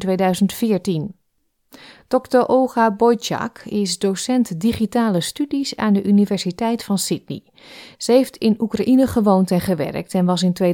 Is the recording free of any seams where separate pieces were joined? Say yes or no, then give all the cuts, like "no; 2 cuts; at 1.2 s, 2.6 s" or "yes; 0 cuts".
yes; 0 cuts